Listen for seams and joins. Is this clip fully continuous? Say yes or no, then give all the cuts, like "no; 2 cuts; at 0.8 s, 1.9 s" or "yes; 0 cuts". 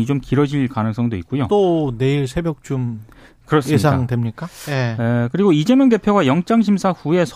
yes; 0 cuts